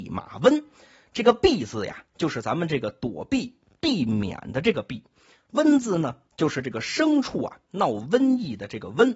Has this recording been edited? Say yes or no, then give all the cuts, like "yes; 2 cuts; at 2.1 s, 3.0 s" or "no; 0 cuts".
no; 0 cuts